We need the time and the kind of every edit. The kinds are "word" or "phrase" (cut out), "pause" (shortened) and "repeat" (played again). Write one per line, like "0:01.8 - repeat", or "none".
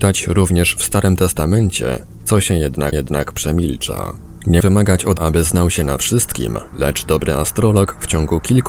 0:02.9 - repeat
0:04.6 - word
0:05.2 - word